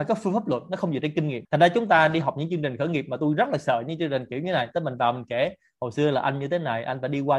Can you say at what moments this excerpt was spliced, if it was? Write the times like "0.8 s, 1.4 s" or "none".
none